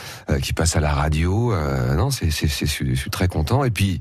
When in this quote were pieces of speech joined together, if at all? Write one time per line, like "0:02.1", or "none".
none